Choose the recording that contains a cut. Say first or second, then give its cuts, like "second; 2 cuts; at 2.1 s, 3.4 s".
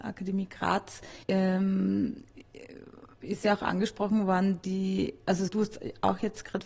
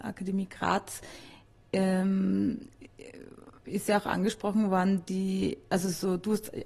first; 2 cuts; at 1.2 s, 5.5 s